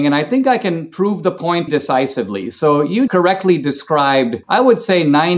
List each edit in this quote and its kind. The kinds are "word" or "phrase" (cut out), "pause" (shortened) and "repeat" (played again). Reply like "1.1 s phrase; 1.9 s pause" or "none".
1.7 s word; 3.1 s word; 4.4 s pause